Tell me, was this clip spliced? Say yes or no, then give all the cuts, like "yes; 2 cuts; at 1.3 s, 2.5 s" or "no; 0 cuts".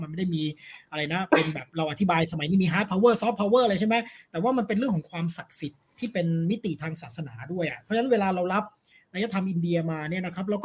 no; 0 cuts